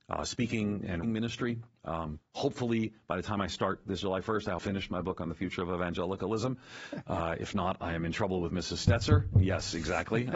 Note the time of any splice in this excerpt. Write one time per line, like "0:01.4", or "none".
0:01.0
0:04.0
0:04.6